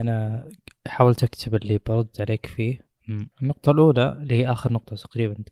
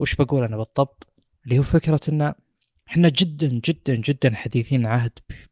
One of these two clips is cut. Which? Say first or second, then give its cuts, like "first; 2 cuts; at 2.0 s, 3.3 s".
first; 2 cuts; at 2.1 s, 3.3 s